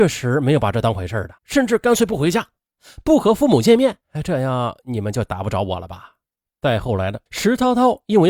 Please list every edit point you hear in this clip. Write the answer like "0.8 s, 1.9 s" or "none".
1.4 s, 4.0 s, 6.3 s, 7.3 s

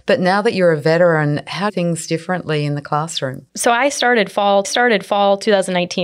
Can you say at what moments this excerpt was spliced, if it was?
1.7 s, 3.5 s, 4.6 s

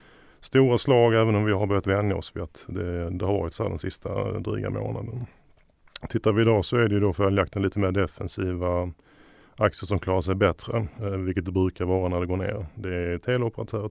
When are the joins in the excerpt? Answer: none

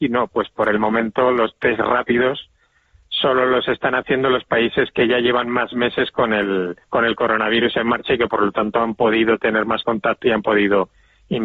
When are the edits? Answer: 6.8 s

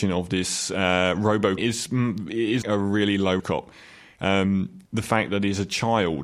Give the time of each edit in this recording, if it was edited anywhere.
1.6 s, 2.6 s, 3.4 s, 4.9 s

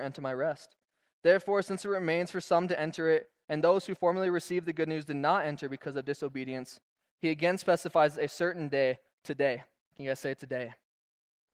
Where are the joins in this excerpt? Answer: none

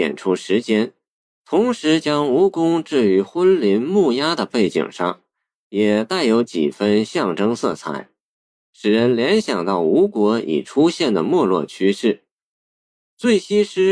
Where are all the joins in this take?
none

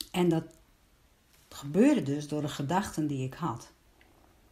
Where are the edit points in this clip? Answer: 1.1 s

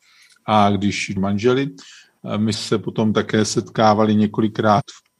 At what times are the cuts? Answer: 1.2 s, 2.5 s

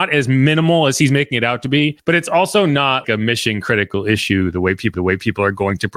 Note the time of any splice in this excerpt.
2.0 s, 3.0 s, 4.9 s

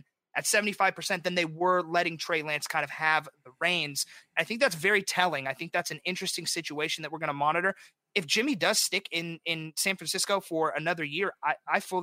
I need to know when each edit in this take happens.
none

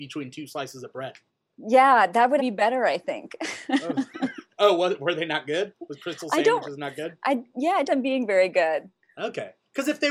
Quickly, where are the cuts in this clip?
1.3 s, 2.4 s, 7.9 s

